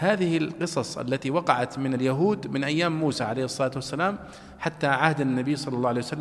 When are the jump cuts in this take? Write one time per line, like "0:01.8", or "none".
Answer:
none